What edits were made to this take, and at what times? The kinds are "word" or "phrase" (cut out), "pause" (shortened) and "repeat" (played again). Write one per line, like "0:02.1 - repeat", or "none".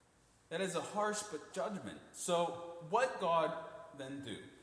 0:01.5 - word
0:03.2 - word